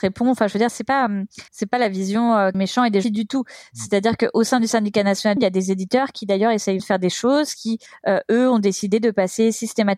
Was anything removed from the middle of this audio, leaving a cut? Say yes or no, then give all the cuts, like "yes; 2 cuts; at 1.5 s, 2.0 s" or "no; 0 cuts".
yes; 6 cuts; at 1.5 s, 2.5 s, 3.0 s, 5.4 s, 6.8 s, 7.9 s